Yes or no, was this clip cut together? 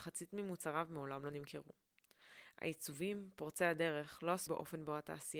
yes